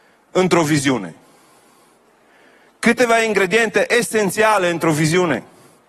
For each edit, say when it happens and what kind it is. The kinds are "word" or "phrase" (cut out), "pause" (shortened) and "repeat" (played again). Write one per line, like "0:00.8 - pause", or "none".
none